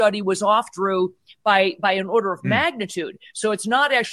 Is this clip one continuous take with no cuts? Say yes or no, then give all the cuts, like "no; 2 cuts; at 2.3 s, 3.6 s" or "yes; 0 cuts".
yes; 0 cuts